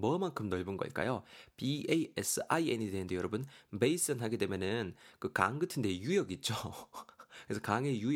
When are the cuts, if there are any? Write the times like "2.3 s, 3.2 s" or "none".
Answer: none